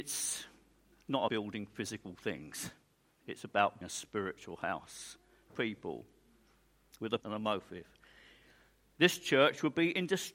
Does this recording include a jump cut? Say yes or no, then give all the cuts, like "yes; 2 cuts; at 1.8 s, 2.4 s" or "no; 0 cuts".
yes; 4 cuts; at 1.3 s, 3.8 s, 5.5 s, 7.2 s